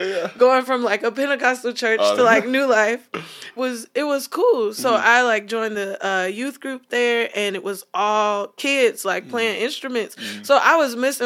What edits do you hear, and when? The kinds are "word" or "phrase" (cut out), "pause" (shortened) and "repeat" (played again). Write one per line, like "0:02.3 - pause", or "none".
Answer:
0:03.6 - phrase